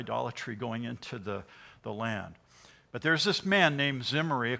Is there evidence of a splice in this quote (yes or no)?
no